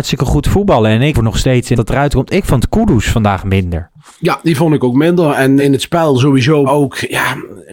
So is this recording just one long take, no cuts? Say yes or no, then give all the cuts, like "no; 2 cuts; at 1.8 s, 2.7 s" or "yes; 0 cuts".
no; 4 cuts; at 1.1 s, 1.8 s, 5.6 s, 6.7 s